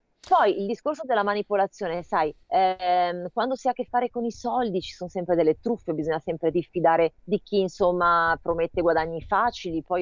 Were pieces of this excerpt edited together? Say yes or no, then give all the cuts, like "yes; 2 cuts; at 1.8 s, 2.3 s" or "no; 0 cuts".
yes; 2 cuts; at 2.4 s, 7.2 s